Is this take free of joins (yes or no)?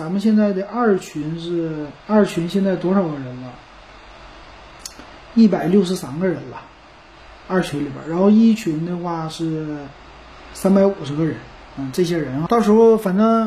no